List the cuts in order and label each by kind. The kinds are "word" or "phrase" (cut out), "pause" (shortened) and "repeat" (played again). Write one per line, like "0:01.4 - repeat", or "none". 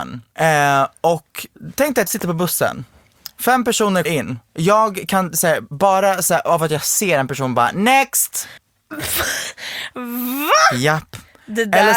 0:02.1 - word
0:04.0 - word
0:08.6 - pause